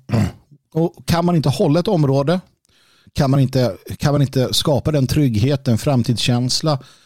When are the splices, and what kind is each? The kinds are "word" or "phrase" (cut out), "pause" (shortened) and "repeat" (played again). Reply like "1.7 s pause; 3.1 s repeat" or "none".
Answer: none

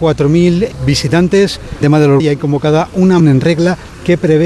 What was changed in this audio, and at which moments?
1.8 s word; 2.2 s word; 3.2 s word

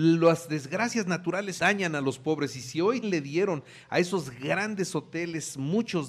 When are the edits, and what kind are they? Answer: 1.6 s word; 3.0 s word

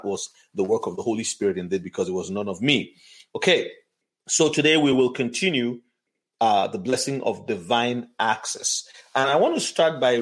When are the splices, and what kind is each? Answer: none

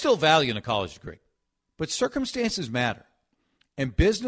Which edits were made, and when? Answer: 1.5 s pause

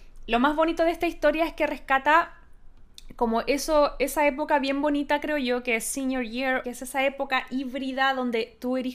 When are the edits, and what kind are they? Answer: 6.6 s phrase

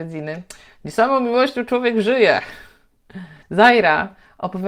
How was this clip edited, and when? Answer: 3.4 s pause

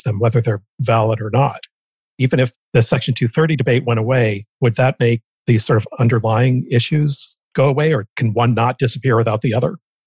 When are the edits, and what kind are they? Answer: none

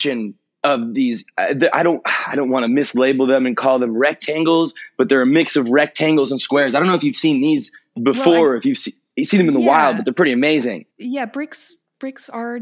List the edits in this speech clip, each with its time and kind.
10.9 s pause

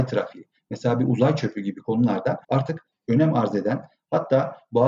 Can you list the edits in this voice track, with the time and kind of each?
2.4 s pause

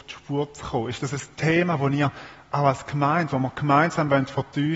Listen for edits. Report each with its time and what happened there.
none

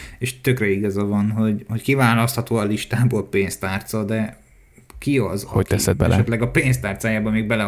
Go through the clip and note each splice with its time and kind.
none

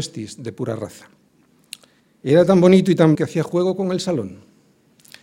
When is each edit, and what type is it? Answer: 2.0 s pause; 3.1 s word

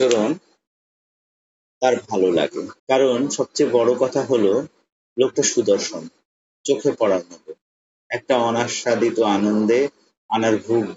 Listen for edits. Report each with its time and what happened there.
2.8 s pause

